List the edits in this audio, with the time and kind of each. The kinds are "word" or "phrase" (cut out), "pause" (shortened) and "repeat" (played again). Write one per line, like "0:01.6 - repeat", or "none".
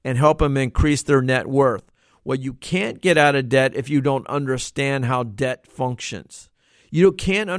none